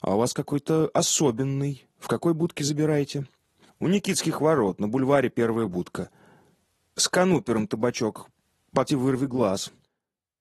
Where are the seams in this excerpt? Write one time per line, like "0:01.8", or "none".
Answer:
0:08.9